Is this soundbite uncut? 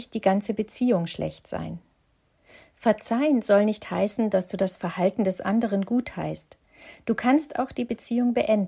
yes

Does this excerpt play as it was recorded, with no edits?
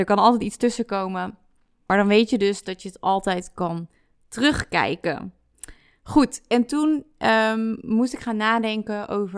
yes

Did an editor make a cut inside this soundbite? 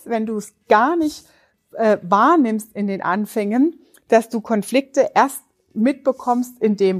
no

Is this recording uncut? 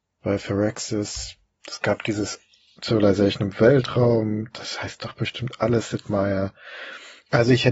yes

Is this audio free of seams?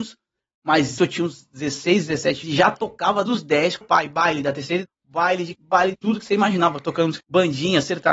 no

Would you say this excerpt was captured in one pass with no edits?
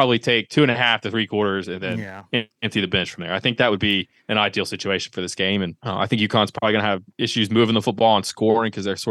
no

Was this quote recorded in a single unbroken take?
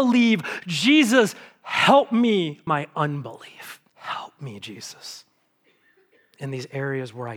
no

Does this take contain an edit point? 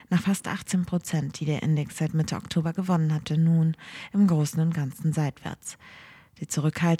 yes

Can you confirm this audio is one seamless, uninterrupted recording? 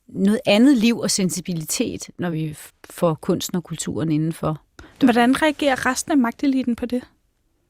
yes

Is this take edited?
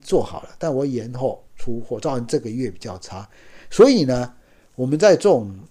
yes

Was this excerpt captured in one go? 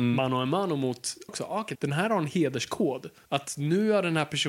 no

